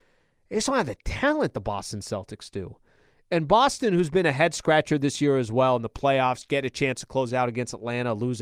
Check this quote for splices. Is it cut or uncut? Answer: uncut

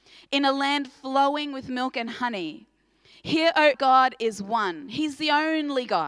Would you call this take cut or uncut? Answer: cut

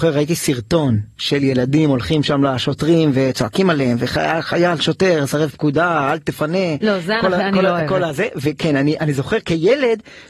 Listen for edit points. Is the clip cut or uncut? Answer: uncut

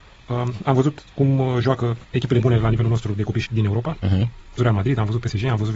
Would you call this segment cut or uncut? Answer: cut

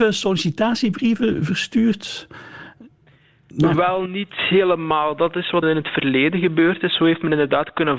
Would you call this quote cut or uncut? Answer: cut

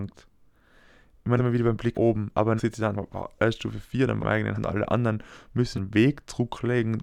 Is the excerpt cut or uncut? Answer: cut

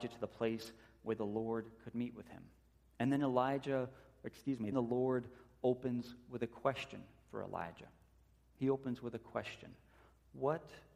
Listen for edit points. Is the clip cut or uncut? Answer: cut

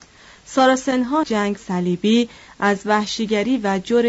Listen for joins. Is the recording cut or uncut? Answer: cut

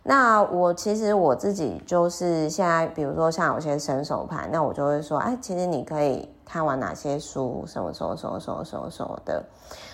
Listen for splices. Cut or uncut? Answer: uncut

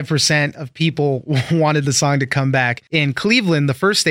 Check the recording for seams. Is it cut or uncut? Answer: uncut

